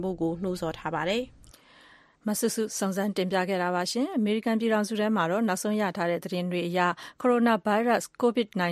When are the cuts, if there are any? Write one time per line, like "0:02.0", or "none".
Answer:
none